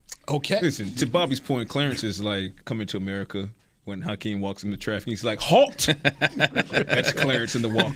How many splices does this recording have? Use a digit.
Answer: 1